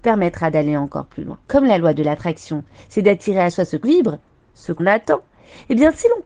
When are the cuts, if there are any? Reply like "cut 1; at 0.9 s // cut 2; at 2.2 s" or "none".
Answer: cut 1; at 1.4 s // cut 2; at 3.8 s // cut 3; at 4.8 s